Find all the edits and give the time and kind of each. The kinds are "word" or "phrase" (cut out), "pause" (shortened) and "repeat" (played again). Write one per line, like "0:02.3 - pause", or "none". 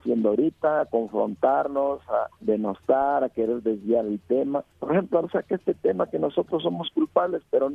0:02.4 - pause
0:04.7 - pause
0:05.2 - word

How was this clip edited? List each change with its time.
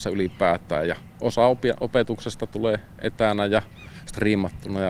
none

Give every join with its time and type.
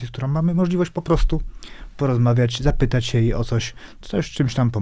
none

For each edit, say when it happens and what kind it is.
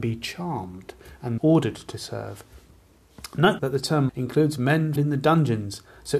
0:01.4 - word
0:03.6 - word
0:04.1 - word
0:05.0 - word

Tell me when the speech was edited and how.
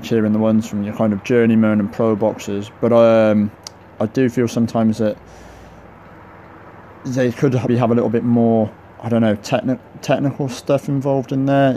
0:07.7 - word

